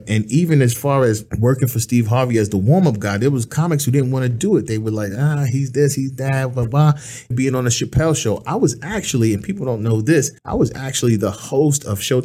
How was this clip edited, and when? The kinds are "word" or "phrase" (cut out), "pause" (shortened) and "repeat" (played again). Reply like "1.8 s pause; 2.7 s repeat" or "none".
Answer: 1.3 s pause; 7.3 s word; 10.4 s pause

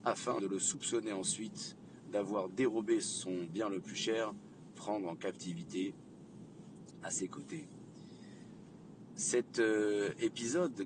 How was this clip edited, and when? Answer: 4.7 s phrase

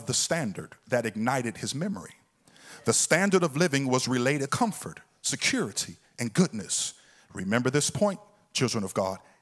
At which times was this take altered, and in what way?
4.5 s word

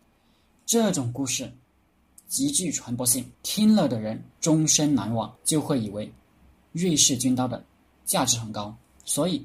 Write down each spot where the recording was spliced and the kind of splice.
3.3 s pause; 4.3 s pause; 5.4 s pause

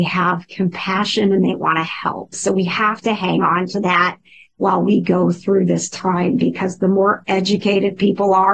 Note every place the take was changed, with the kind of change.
none

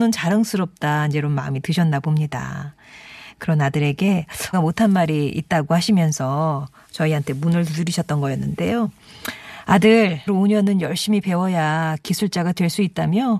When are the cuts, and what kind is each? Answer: 4.5 s word; 10.3 s word

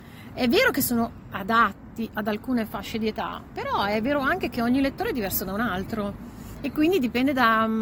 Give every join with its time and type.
none

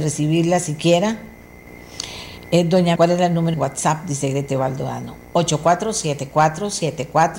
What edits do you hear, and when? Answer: 3.0 s word; 3.5 s word

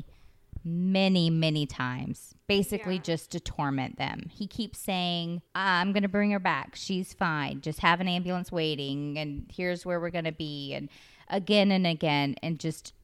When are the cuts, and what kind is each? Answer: 5.5 s pause

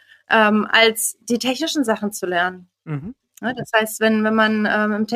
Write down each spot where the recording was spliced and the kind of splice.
2.7 s pause

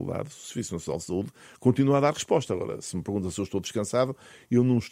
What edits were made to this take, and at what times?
none

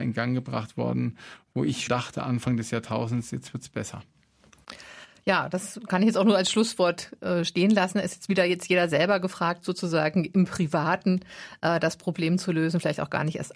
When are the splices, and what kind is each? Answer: 1.9 s word

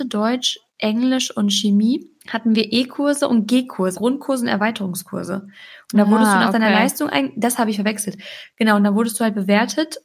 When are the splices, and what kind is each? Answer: 2.2 s pause; 3.9 s word

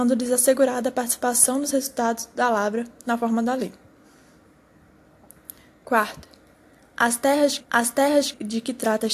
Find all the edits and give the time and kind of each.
7.6 s repeat

